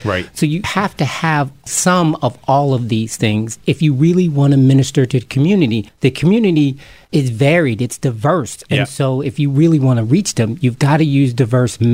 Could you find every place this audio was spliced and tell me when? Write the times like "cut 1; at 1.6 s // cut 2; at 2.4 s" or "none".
none